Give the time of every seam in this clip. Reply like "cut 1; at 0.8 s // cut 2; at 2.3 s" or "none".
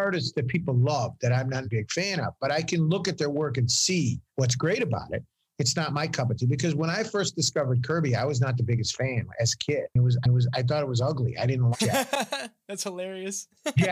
cut 1; at 1.6 s // cut 2; at 4.3 s // cut 3; at 10.2 s // cut 4; at 11.7 s